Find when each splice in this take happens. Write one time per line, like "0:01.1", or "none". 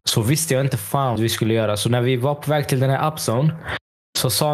0:01.2